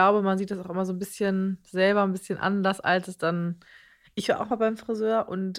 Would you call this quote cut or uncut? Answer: uncut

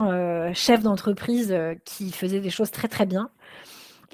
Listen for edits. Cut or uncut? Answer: uncut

